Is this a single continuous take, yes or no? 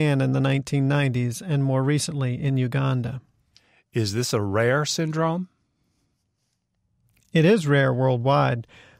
yes